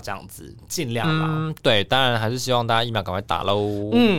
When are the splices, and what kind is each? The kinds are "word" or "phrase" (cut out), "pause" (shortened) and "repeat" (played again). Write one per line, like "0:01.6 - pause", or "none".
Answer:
none